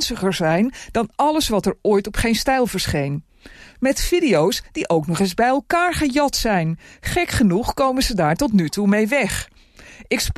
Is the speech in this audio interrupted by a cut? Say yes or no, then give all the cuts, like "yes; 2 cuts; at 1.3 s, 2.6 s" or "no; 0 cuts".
no; 0 cuts